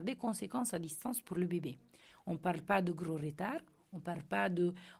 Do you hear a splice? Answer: no; 0 cuts

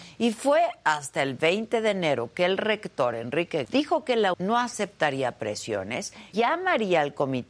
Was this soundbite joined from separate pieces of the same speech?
yes; 3 cuts; at 3.6 s, 4.3 s, 6.3 s

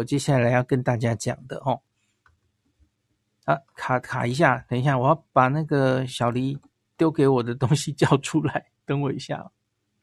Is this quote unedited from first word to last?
yes; 0 cuts

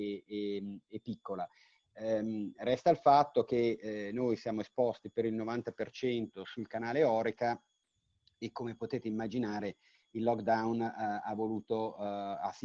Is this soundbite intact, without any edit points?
yes; 0 cuts

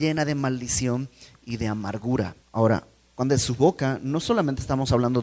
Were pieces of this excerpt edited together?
yes; 2 cuts; at 2.4 s, 3.3 s

